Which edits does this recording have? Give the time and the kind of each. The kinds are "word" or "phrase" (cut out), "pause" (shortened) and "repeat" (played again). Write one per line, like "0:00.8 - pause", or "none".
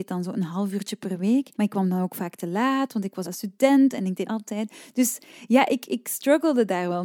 0:01.5 - pause
0:03.2 - phrase
0:04.2 - phrase